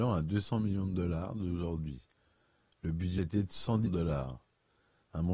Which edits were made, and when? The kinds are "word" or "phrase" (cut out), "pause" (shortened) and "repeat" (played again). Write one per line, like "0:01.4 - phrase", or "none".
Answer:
0:03.2 - word
0:03.9 - word